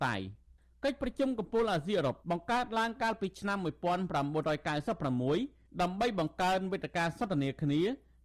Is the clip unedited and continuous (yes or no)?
no